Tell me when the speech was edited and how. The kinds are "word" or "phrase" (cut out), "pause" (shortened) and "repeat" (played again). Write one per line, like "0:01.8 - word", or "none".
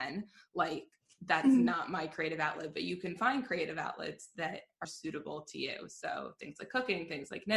0:04.8 - word